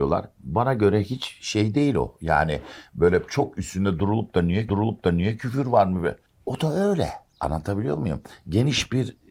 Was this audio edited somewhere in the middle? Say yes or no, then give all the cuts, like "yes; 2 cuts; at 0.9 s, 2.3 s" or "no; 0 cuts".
yes; 2 cuts; at 4.7 s, 6.3 s